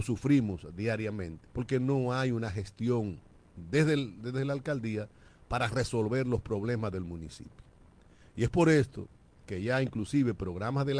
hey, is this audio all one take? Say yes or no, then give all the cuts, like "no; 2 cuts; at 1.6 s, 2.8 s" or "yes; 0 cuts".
no; 1 cut; at 1.5 s